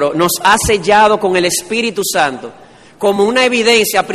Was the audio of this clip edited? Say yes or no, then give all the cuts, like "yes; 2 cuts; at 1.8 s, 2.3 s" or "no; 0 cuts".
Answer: no; 0 cuts